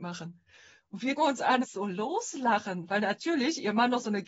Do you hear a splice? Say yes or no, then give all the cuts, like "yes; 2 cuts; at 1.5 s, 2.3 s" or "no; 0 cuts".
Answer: yes; 2 cuts; at 1.2 s, 1.6 s